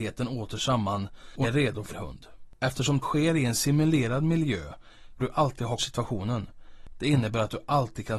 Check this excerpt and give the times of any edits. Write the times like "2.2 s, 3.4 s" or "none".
1.4 s, 1.9 s, 3.0 s, 5.2 s, 5.8 s

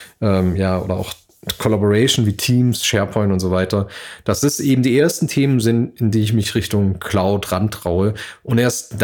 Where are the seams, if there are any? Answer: none

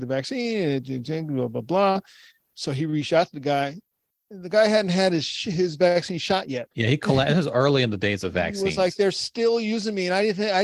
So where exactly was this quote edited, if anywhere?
6.7 s

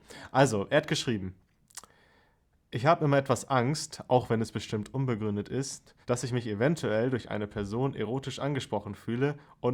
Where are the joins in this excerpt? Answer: 6.0 s

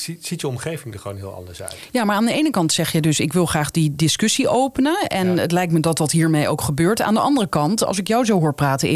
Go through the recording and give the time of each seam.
none

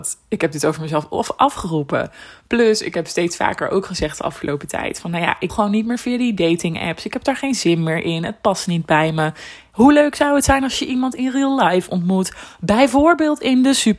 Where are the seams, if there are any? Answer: 5.5 s

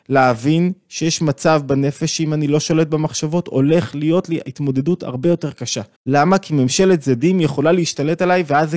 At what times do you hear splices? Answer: 5.9 s

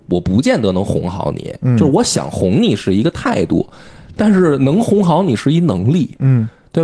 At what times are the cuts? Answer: none

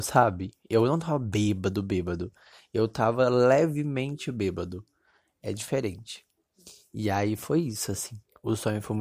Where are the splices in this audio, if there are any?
none

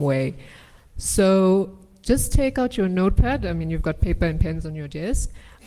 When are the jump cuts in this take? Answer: none

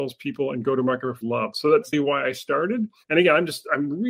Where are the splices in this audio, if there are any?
1.2 s, 1.9 s

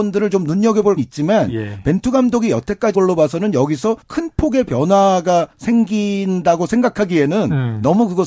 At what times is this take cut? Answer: 1.0 s, 2.9 s, 4.0 s, 5.5 s

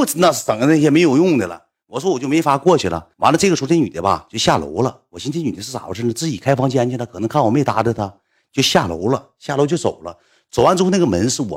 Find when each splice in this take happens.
3.1 s

